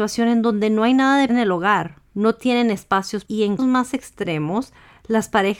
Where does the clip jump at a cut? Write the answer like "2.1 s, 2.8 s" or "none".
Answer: 1.3 s, 2.1 s, 3.3 s, 3.6 s